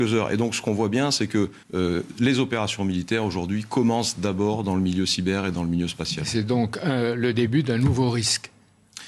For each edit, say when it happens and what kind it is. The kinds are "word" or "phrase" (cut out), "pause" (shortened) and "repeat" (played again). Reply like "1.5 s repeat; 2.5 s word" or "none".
1.6 s pause